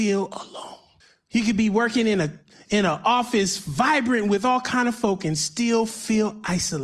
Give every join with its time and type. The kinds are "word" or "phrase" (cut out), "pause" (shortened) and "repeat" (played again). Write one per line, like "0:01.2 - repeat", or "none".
0:01.0 - pause